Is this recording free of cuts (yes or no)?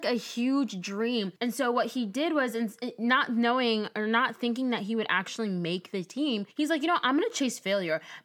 no